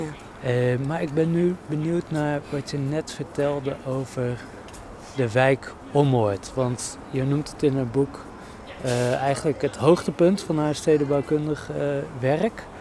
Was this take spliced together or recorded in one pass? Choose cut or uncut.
uncut